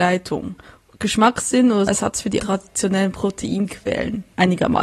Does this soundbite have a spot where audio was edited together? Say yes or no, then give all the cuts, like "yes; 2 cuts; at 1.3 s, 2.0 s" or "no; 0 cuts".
yes; 2 cuts; at 1.9 s, 2.4 s